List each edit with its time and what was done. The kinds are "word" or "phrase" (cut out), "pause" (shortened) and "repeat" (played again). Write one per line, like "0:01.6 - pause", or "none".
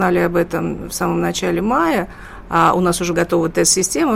0:03.1 - word

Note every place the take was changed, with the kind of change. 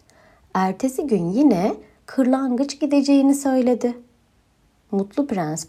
none

